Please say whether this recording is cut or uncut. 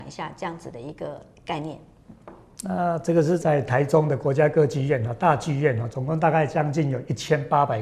uncut